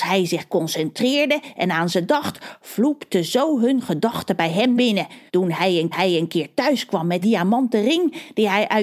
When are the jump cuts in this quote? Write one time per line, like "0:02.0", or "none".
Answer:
0:04.8
0:05.3
0:05.9
0:07.2